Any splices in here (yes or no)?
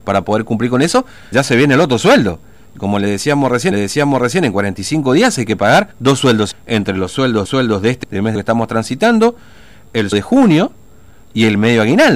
yes